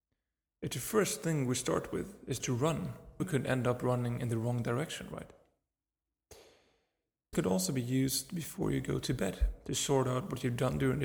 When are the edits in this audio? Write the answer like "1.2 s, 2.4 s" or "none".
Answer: 2.4 s, 3.2 s, 7.3 s